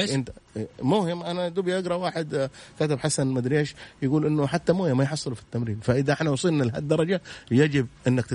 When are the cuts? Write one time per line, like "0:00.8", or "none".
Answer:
none